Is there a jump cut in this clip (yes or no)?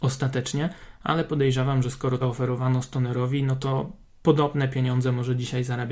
yes